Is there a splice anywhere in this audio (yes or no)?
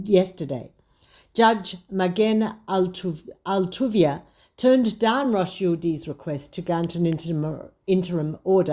no